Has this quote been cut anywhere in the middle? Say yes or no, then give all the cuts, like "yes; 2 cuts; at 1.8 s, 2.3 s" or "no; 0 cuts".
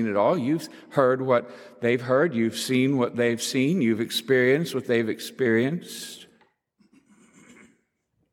no; 0 cuts